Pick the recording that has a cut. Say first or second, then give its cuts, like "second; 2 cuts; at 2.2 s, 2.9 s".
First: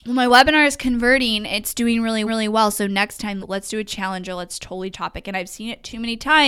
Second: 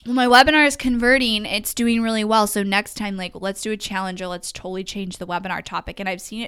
first; 3 cuts; at 2.3 s, 3.4 s, 4.9 s